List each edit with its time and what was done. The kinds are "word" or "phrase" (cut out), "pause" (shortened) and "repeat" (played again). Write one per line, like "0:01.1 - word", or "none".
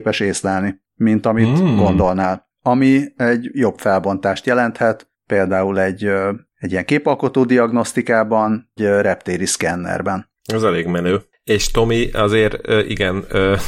0:08.8 - word